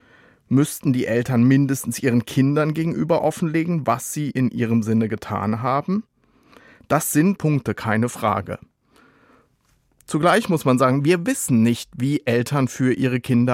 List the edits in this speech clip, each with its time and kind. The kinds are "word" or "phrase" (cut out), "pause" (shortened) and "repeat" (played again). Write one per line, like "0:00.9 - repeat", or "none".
0:07.4 - word